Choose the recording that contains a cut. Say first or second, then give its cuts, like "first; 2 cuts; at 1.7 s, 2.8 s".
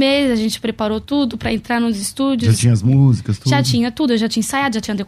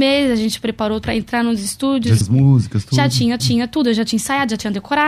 second; 3 cuts; at 1.0 s, 2.2 s, 3.4 s